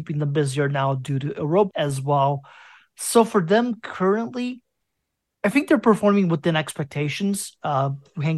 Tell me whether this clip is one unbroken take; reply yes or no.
no